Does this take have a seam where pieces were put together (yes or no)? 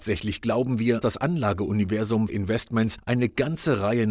yes